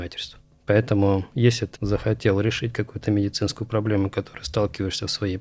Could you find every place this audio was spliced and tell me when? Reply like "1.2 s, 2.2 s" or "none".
1.3 s, 1.8 s